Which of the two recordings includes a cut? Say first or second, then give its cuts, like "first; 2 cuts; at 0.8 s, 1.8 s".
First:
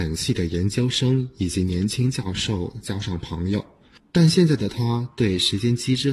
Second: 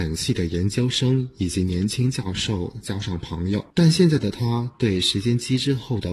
second; 1 cut; at 3.7 s